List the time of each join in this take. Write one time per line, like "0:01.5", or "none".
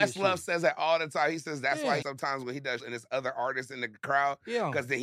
0:02.0
0:02.8